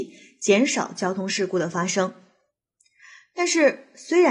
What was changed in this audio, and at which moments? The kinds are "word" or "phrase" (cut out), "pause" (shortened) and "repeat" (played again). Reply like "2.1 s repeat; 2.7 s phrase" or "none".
none